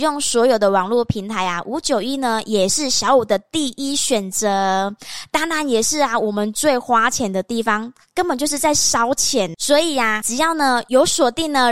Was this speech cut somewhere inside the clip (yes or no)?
yes